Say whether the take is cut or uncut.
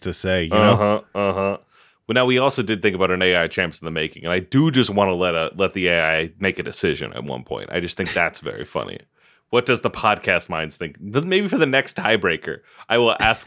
uncut